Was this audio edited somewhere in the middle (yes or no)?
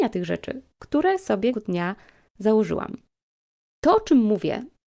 yes